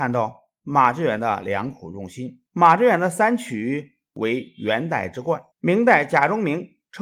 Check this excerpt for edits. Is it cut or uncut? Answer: cut